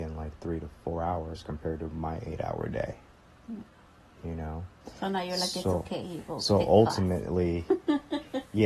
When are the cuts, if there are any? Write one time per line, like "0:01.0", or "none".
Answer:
none